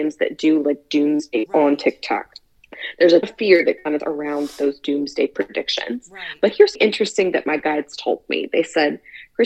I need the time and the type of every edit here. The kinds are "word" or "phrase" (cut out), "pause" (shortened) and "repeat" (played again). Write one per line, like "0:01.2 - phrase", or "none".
0:01.5 - word
0:03.2 - word
0:04.0 - word
0:06.7 - word

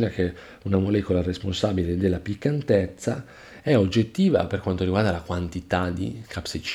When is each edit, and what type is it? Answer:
none

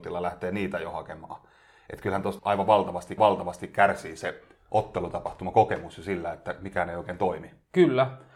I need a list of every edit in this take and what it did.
0:02.4 - word
0:03.2 - repeat

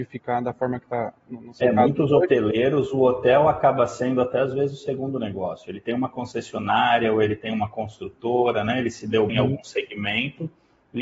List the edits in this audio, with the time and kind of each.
0:09.3 - word

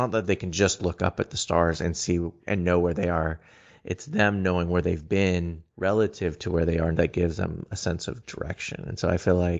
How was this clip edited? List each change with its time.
0:05.7 - pause
0:06.9 - word

